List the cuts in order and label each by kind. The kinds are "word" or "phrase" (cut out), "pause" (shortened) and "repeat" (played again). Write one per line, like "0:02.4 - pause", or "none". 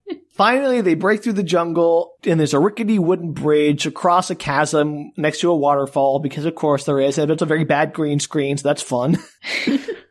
0:07.4 - word